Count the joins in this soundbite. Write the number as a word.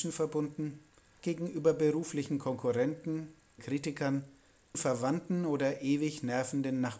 three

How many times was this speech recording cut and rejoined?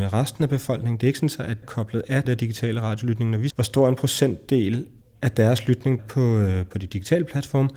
five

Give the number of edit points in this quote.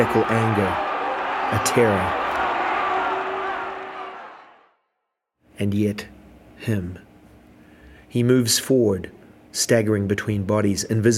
zero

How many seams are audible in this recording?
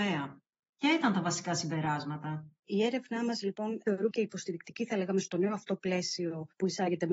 one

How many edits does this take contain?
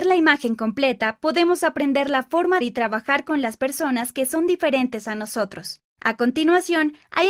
two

